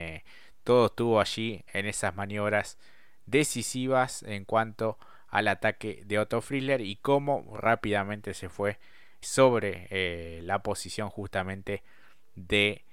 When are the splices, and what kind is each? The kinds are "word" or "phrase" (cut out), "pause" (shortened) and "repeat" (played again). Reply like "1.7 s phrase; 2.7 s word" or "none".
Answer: 9.2 s word